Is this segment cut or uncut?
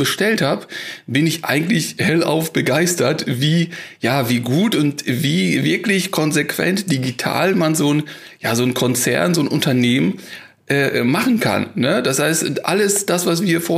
uncut